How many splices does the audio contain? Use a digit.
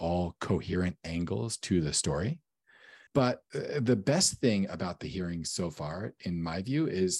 0